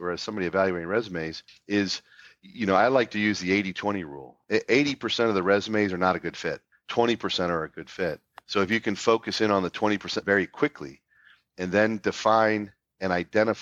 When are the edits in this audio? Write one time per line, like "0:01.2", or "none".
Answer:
none